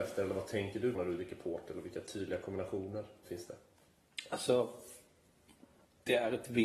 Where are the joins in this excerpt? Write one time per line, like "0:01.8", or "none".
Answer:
0:00.9